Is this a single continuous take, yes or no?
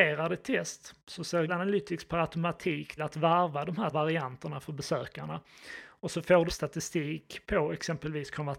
no